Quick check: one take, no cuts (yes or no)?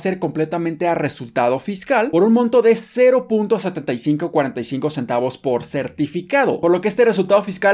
yes